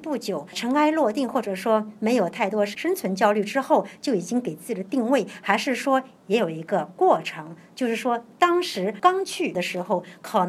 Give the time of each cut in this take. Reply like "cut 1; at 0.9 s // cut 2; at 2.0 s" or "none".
none